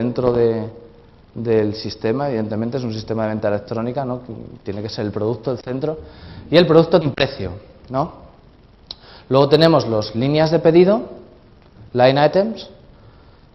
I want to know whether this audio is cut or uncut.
cut